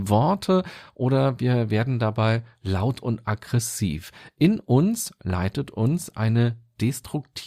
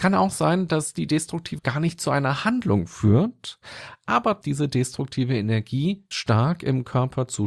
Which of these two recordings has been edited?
second; 3 cuts; at 1.6 s, 4.4 s, 6.1 s

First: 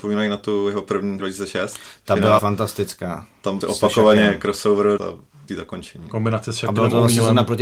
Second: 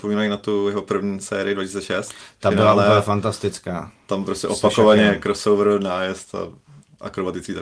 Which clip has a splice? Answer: first; 5 cuts; at 1.2 s, 2.4 s, 3.6 s, 5.0 s, 5.5 s

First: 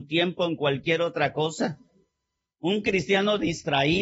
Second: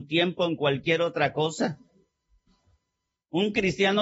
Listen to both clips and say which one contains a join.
first; 1 cut; at 2.2 s

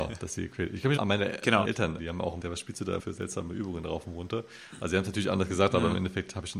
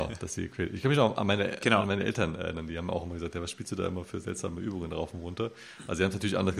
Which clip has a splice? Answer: first; 5 cuts; at 1.0 s, 1.6 s, 2.0 s, 2.4 s, 3.0 s

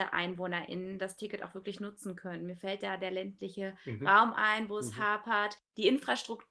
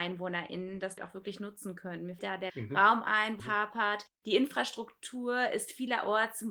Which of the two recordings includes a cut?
second; 4 cuts; at 1.0 s, 2.2 s, 2.5 s, 3.4 s

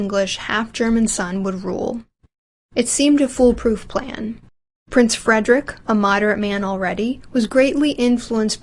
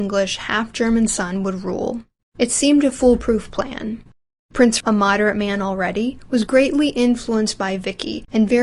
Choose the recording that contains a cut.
second; 2 cuts; at 2.2 s, 4.8 s

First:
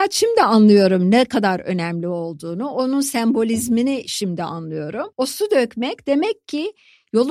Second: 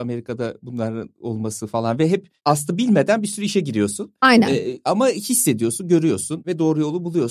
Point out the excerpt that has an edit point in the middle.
first; 1 cut; at 5.1 s

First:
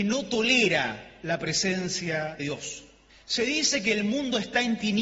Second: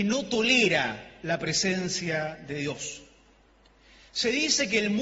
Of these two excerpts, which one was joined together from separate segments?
first; 2 cuts; at 2.4 s, 3.1 s

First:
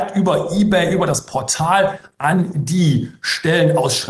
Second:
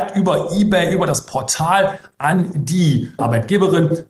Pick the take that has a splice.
second; 1 cut; at 3.2 s

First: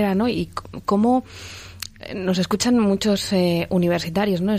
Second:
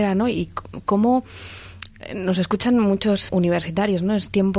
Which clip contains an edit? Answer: second; 1 cut; at 3.3 s

